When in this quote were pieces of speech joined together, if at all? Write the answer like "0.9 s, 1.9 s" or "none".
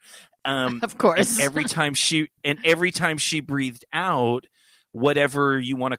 none